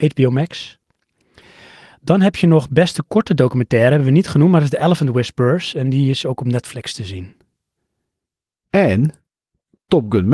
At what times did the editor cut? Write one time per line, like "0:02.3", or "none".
none